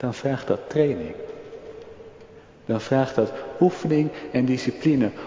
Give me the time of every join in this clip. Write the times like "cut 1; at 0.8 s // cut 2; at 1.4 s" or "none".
none

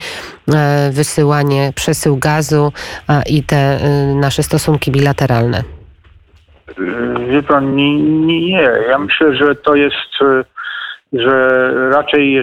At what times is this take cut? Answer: none

